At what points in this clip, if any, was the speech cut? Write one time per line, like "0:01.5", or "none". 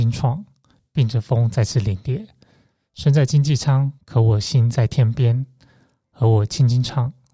0:04.0